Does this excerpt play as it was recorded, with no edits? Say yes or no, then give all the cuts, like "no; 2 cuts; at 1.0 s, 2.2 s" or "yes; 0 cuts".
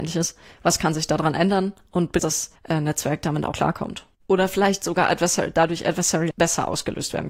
no; 5 cuts; at 2.2 s, 2.6 s, 3.5 s, 4.1 s, 6.3 s